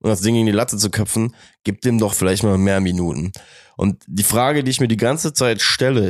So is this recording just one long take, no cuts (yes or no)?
yes